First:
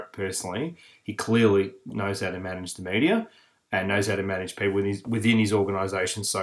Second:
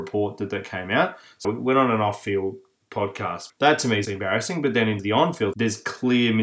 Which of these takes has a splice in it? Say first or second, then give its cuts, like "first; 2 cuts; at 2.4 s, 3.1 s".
second; 5 cuts; at 1.4 s, 3.5 s, 4.1 s, 5.0 s, 5.5 s